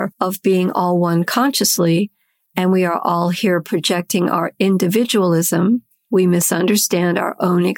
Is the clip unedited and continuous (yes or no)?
yes